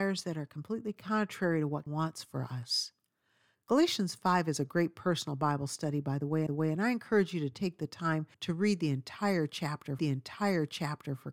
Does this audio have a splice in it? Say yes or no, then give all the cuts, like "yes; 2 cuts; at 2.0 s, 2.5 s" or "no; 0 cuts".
yes; 4 cuts; at 1.9 s, 6.5 s, 8.3 s, 10.0 s